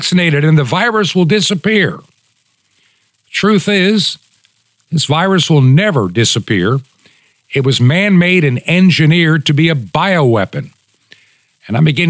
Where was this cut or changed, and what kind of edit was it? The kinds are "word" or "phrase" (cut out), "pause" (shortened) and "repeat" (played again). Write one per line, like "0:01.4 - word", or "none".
none